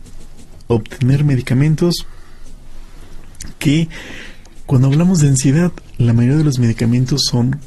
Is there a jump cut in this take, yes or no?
no